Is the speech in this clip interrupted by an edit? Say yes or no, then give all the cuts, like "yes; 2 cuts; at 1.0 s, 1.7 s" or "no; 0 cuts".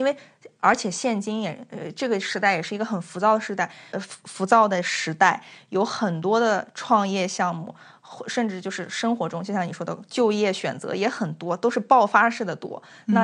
yes; 1 cut; at 3.9 s